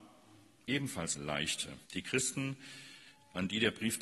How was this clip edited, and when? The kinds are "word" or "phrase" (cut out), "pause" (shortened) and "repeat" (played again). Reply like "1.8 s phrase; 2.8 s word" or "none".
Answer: 1.2 s word; 1.8 s pause